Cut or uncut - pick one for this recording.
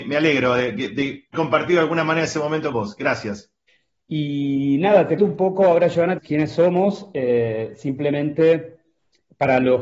cut